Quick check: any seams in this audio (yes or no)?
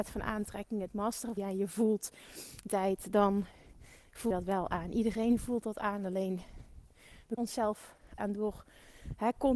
yes